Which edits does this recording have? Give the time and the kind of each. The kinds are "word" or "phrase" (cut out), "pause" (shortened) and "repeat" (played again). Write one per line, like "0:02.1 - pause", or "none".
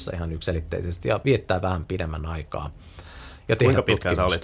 none